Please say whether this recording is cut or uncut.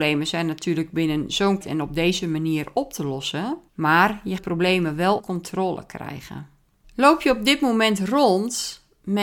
cut